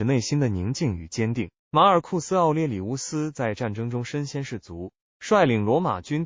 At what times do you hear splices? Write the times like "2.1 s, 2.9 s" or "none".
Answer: 1.6 s